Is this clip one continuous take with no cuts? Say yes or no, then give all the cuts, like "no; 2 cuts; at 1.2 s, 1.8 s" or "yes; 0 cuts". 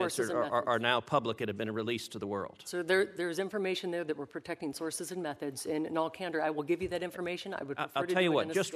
yes; 0 cuts